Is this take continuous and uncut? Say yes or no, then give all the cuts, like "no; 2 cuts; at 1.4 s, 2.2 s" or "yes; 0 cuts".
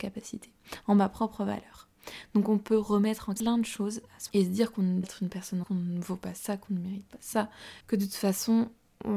no; 5 cuts; at 3.4 s, 4.3 s, 5.0 s, 5.6 s, 7.8 s